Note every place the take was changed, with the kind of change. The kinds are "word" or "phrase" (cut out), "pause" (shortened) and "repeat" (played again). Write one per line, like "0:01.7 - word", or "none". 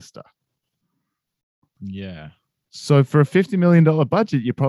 none